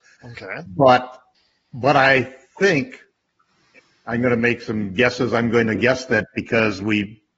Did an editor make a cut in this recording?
no; 0 cuts

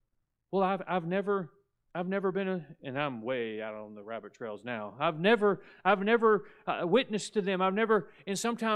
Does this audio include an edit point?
yes; 1 cut; at 1.8 s

